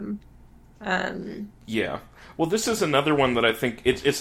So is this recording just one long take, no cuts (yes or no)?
no